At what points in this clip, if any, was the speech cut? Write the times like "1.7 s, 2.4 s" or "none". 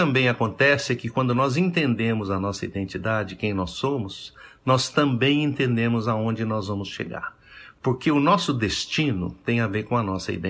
none